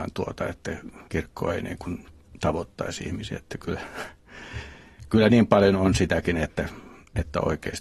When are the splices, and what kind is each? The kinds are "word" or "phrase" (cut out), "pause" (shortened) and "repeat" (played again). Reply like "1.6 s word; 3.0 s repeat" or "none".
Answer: 1.1 s pause